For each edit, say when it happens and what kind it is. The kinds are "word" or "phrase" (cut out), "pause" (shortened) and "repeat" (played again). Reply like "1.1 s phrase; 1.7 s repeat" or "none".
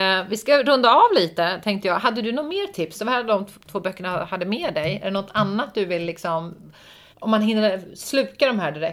7.1 s pause